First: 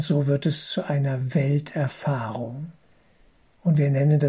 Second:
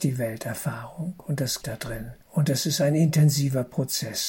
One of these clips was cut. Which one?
second; 2 cuts; at 1.6 s, 2.2 s

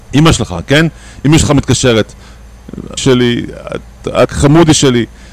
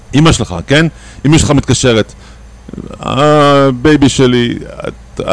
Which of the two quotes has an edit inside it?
first; 2 cuts; at 3.0 s, 4.3 s

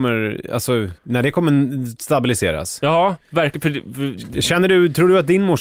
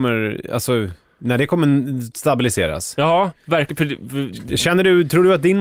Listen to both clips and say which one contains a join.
first; 1 cut; at 1.0 s

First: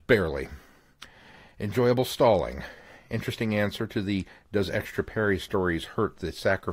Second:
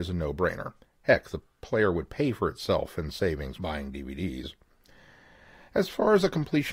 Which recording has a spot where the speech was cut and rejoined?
second; 1 cut; at 3.5 s

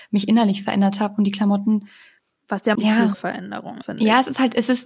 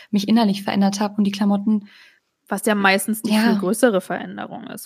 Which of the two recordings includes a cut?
first; 3 cuts; at 2.8 s, 3.1 s, 3.8 s

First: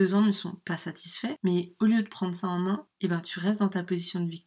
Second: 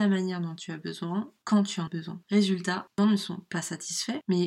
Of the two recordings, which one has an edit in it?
second; 3 cuts; at 1.4 s, 1.9 s, 3.0 s

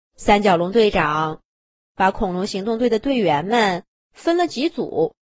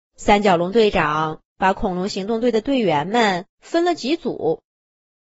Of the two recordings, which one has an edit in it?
second; 2 cuts; at 1.5 s, 3.5 s

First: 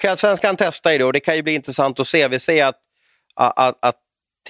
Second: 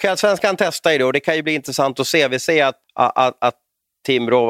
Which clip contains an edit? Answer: second; 1 cut; at 2.8 s

